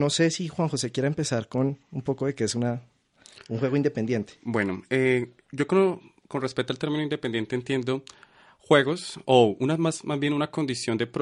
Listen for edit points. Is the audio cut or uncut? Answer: uncut